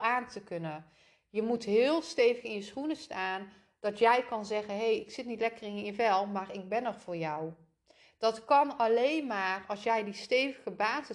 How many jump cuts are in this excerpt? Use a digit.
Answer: 0